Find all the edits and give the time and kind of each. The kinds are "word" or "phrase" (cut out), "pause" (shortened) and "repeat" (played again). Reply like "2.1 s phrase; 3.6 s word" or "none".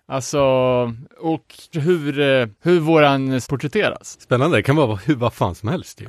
1.7 s word; 2.5 s pause; 3.4 s word